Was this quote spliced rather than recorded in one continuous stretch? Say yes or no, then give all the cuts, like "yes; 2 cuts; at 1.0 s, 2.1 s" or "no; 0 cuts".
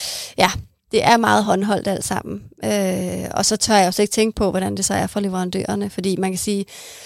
no; 0 cuts